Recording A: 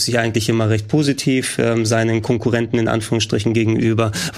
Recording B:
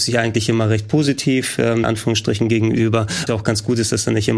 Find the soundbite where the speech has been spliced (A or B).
B